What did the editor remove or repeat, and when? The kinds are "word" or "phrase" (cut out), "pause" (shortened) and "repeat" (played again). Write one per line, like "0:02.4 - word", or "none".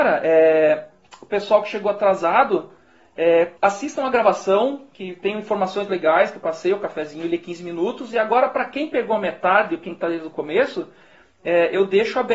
0:03.6 - pause